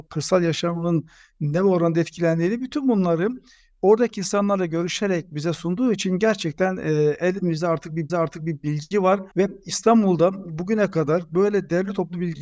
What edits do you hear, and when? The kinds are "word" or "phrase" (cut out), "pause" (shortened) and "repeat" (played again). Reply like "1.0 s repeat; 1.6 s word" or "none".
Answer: 8.1 s repeat; 9.3 s pause